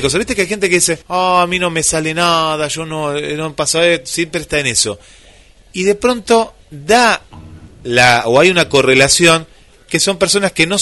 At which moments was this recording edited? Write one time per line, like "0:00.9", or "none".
0:01.0
0:06.6